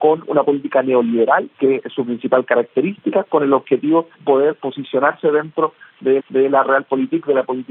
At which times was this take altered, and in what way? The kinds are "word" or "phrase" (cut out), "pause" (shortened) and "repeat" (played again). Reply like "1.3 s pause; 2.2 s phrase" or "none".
1.5 s pause; 4.1 s word; 6.2 s repeat